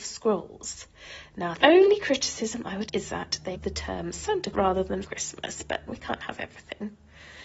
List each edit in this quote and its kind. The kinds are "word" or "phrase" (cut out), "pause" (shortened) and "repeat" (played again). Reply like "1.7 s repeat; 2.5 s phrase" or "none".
1.6 s word; 2.9 s word; 3.5 s word; 4.5 s word; 5.0 s word; 5.9 s word